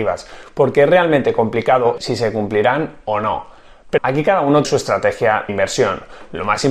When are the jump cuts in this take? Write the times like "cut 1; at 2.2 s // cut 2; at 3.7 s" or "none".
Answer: cut 1; at 2.0 s // cut 2; at 4.0 s // cut 3; at 4.6 s // cut 4; at 5.5 s